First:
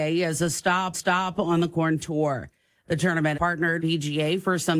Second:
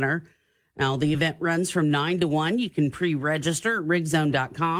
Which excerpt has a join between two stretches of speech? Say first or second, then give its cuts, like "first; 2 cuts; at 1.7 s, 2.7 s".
first; 4 cuts; at 0.9 s, 2.0 s, 3.3 s, 3.8 s